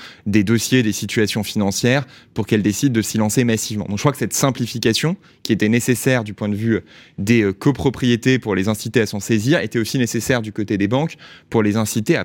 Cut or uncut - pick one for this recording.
uncut